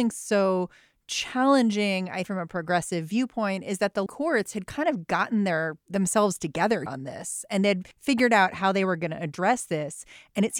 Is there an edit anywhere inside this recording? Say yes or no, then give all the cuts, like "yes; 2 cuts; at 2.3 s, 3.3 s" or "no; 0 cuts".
yes; 5 cuts; at 2.2 s, 4.1 s, 5.8 s, 6.9 s, 7.9 s